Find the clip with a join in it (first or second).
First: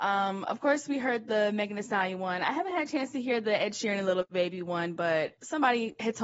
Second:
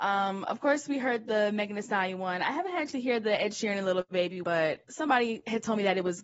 second